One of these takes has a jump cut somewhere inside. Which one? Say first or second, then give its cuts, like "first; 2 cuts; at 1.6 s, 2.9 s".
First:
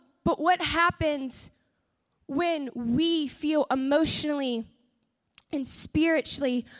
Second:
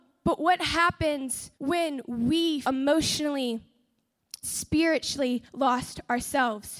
second; 4 cuts; at 1.6 s, 2.6 s, 4.4 s, 5.5 s